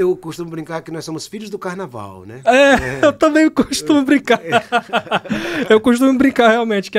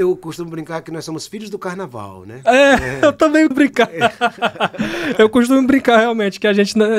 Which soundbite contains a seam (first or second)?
second